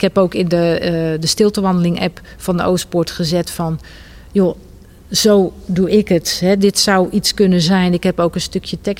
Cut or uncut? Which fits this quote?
uncut